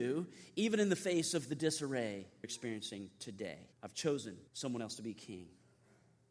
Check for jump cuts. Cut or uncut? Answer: cut